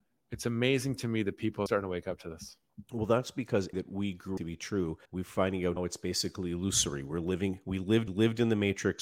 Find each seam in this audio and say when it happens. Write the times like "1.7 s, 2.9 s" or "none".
1.7 s, 3.7 s, 4.4 s, 5.1 s, 5.8 s, 8.1 s